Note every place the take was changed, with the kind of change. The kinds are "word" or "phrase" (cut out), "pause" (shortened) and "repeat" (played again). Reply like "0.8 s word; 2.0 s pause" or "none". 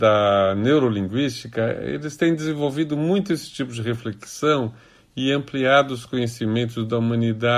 none